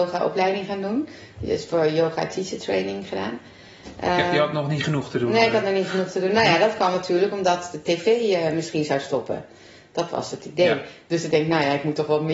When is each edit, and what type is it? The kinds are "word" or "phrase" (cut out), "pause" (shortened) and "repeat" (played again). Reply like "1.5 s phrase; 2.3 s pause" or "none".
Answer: none